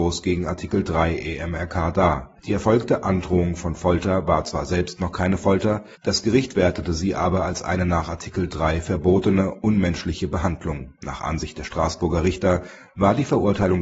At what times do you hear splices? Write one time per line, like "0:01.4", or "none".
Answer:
0:02.4
0:06.0
0:11.0